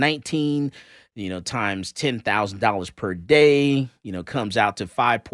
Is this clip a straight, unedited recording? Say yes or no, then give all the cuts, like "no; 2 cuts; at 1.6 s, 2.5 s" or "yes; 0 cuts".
yes; 0 cuts